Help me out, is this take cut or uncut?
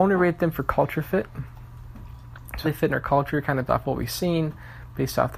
cut